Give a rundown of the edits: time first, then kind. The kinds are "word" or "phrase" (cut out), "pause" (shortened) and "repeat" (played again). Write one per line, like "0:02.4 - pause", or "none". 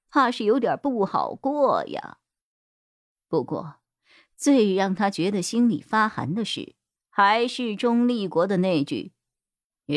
0:07.0 - pause